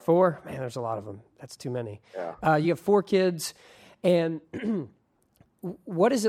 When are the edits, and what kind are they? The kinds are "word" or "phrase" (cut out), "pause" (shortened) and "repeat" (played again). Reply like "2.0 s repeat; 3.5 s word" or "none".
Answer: none